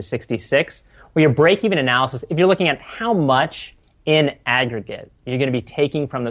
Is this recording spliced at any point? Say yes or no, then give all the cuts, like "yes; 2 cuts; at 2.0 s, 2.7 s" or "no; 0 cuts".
no; 0 cuts